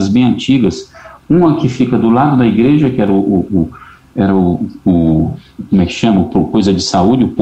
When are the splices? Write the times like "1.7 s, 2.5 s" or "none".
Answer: none